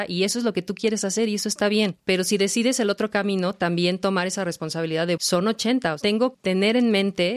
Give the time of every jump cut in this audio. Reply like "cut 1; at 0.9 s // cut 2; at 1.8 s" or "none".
cut 1; at 5.2 s // cut 2; at 6.3 s